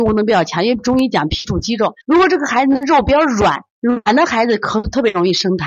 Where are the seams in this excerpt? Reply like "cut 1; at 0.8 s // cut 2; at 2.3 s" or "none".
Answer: cut 1; at 2.0 s // cut 2; at 3.7 s